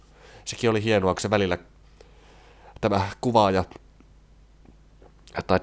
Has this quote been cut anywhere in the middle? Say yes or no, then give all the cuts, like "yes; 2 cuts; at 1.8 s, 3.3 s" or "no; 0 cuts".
no; 0 cuts